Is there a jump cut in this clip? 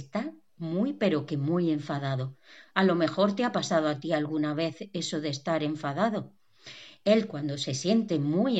no; 0 cuts

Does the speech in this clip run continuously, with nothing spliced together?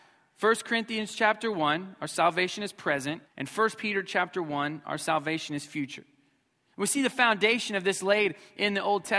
no; 1 cut; at 3.3 s

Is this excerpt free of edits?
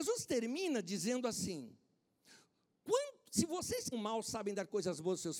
no; 1 cut; at 3.9 s

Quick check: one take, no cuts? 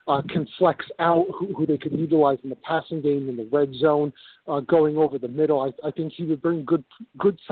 yes; 0 cuts

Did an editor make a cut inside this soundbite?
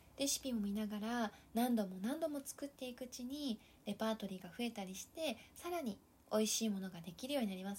no; 0 cuts

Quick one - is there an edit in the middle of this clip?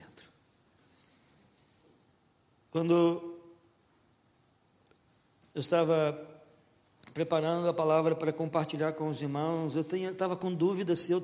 no; 0 cuts

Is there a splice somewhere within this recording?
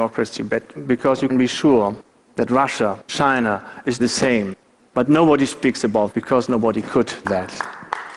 yes; 5 cuts; at 1.3 s, 3.1 s, 4.0 s, 6.1 s, 7.2 s

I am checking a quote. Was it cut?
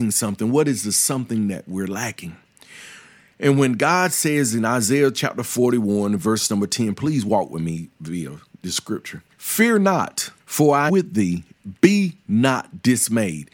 yes; 3 cuts; at 9.3 s, 10.4 s, 10.9 s

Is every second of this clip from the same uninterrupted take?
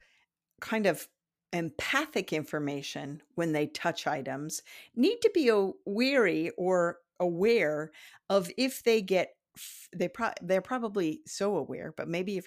yes; 0 cuts

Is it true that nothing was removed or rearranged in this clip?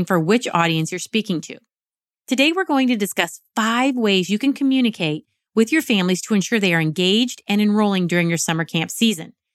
yes; 0 cuts

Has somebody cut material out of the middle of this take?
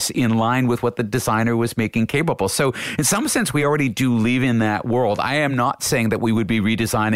no; 0 cuts

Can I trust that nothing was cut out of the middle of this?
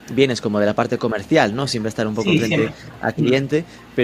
yes; 0 cuts

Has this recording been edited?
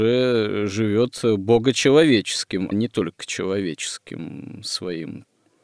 yes; 1 cut; at 2.7 s

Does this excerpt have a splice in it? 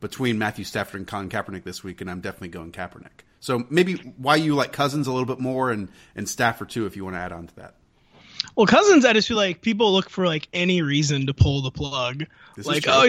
no; 0 cuts

